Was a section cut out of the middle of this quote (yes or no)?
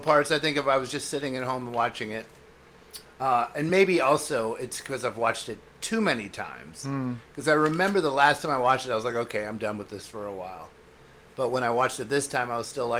no